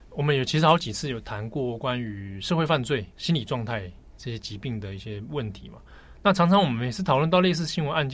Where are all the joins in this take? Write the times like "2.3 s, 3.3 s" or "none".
3.1 s